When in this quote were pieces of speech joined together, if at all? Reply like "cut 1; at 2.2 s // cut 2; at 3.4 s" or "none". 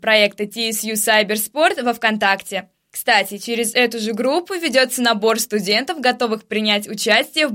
none